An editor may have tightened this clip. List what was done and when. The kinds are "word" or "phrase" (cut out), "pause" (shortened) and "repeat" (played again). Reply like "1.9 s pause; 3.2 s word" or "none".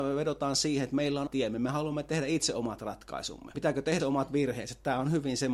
1.3 s word; 4.0 s word